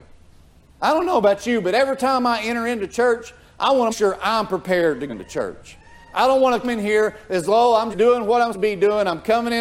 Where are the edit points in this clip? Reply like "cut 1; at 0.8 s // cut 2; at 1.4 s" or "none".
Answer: cut 1; at 3.9 s // cut 2; at 5.1 s // cut 3; at 6.6 s // cut 4; at 7.9 s // cut 5; at 8.5 s